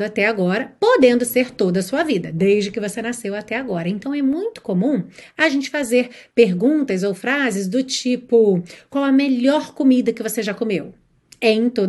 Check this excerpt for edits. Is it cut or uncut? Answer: uncut